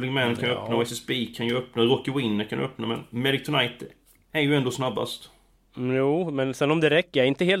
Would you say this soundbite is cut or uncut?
uncut